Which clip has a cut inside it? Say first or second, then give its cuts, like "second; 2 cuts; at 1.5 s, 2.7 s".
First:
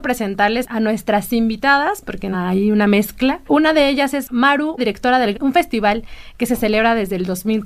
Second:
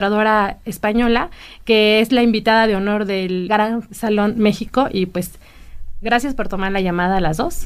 first; 2 cuts; at 4.8 s, 5.3 s